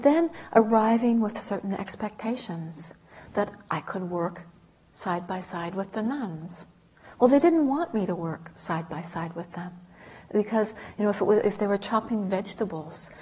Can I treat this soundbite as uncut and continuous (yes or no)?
yes